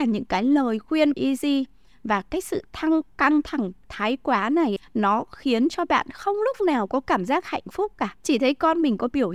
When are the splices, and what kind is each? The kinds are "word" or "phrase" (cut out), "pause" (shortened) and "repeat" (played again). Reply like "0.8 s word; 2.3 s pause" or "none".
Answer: 1.1 s word; 4.8 s word; 8.2 s pause